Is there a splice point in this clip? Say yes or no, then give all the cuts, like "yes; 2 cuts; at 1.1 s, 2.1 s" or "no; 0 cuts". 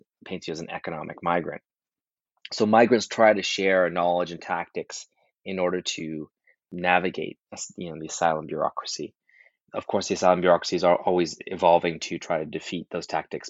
no; 0 cuts